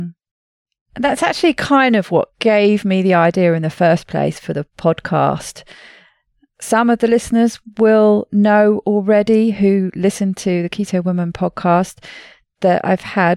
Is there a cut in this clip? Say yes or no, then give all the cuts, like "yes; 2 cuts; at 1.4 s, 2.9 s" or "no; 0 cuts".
no; 0 cuts